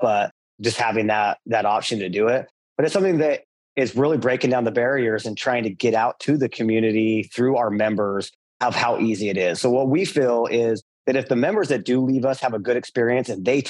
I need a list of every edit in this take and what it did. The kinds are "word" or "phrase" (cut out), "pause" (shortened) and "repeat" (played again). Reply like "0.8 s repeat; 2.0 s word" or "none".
none